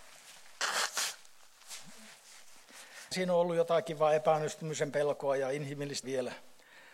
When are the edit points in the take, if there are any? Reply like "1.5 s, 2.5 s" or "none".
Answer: 3.1 s, 6.0 s